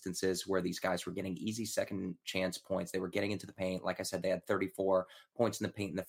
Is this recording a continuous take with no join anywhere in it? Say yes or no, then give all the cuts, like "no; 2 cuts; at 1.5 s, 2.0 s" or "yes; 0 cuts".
yes; 0 cuts